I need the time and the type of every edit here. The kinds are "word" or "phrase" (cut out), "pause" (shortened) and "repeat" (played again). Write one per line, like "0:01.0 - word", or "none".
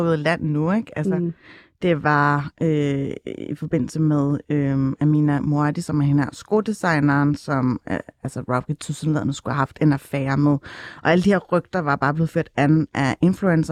none